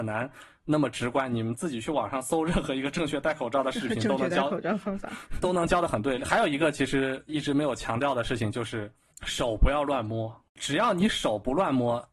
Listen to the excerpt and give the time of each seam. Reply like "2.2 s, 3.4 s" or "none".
5.4 s